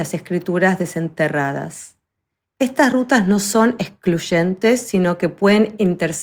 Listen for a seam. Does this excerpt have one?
no; 0 cuts

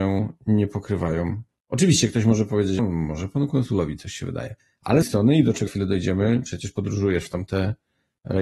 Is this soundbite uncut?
no; 3 cuts; at 2.8 s, 5.0 s, 5.7 s

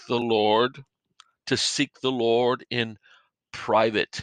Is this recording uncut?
yes; 0 cuts

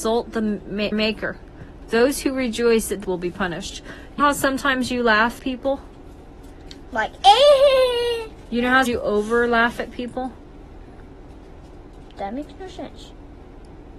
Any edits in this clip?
yes; 5 cuts; at 0.9 s, 3.0 s, 4.2 s, 5.4 s, 8.9 s

